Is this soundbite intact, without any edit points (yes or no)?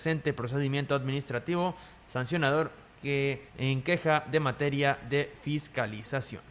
no